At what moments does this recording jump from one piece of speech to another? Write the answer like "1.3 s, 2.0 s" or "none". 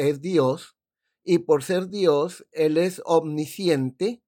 none